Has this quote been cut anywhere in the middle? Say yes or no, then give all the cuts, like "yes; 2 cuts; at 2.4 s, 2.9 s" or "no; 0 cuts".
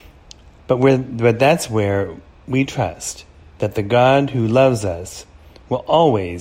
no; 0 cuts